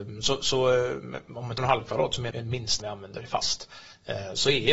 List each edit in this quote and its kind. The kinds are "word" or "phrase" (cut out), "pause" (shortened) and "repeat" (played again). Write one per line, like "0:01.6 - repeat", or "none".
0:01.6 - word
0:02.3 - word
0:02.8 - word